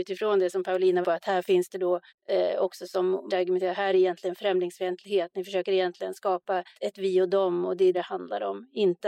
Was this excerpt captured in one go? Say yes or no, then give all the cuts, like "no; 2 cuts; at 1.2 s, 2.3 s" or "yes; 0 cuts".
no; 6 cuts; at 1.0 s, 2.1 s, 3.3 s, 3.9 s, 6.7 s, 7.9 s